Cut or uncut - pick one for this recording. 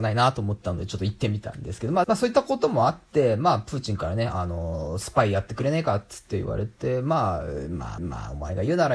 cut